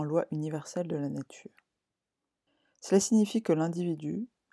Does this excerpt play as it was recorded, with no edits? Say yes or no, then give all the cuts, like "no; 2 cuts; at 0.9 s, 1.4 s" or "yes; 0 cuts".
yes; 0 cuts